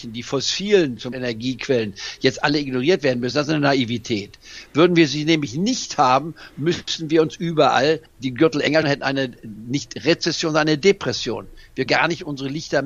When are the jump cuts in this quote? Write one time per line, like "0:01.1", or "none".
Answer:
0:01.1
0:08.1
0:08.8
0:11.9